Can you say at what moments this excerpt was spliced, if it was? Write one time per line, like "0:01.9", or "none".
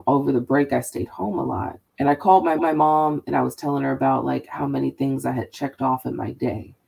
0:01.9
0:02.6